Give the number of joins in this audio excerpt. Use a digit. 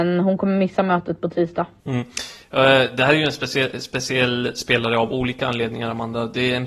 0